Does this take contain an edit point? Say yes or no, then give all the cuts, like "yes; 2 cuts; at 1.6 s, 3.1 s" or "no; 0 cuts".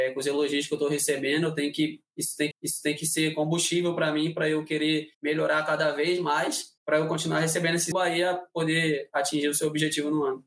yes; 4 cuts; at 2.5 s, 5.1 s, 6.8 s, 7.9 s